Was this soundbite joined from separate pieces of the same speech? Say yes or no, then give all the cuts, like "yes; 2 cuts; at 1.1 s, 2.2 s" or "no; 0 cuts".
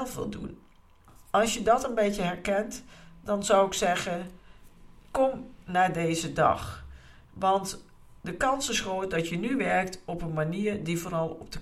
no; 0 cuts